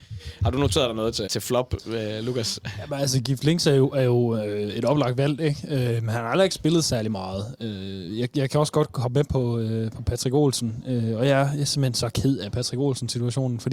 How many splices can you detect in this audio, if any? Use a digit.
1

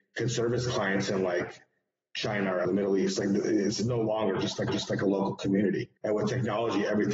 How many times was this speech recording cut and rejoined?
3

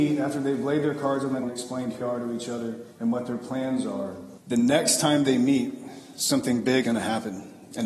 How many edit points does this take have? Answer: 5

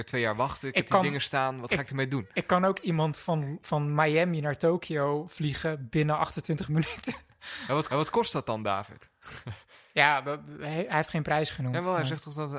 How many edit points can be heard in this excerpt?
1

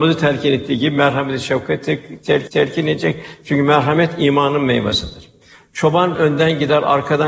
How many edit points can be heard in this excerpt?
2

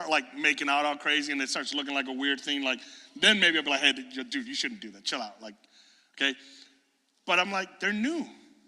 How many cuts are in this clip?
0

